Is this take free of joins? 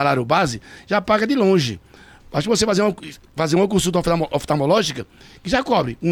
yes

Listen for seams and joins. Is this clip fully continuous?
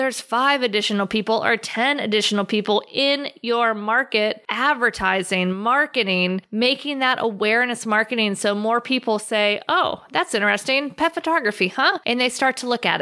yes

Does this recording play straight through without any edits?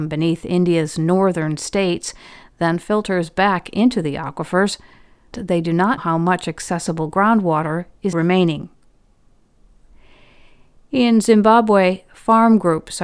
no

